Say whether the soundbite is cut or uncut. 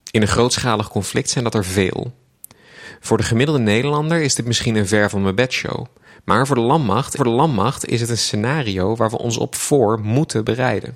cut